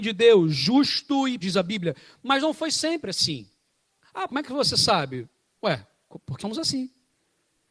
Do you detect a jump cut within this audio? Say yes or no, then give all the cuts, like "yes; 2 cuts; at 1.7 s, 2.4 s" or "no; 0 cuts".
yes; 3 cuts; at 1.4 s, 4.3 s, 6.4 s